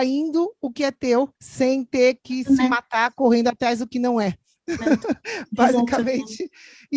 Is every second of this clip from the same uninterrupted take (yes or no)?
no